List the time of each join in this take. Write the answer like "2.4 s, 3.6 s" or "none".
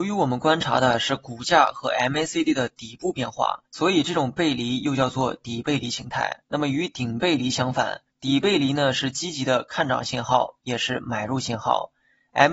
3.7 s, 6.4 s, 8.1 s